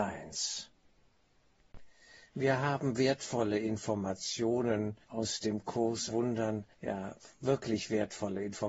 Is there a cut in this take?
yes; 3 cuts; at 5.0 s, 6.1 s, 6.7 s

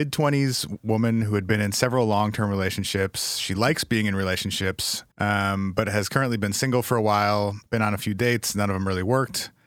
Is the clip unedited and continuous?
no; 2 cuts; at 5.1 s, 7.7 s

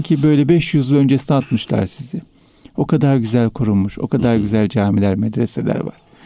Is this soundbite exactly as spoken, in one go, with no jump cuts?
yes; 0 cuts

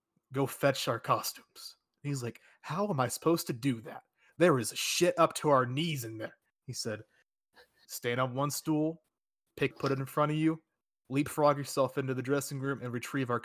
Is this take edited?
yes; 1 cut; at 9.7 s

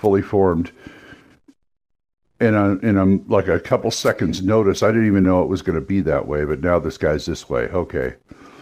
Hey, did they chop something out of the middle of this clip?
no; 0 cuts

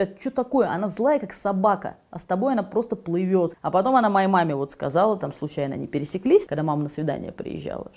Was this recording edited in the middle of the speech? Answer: no; 0 cuts

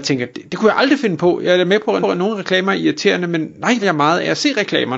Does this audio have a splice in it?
yes; 2 cuts; at 2.0 s, 3.8 s

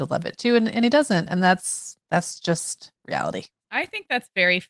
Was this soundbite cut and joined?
yes; 1 cut; at 3.0 s

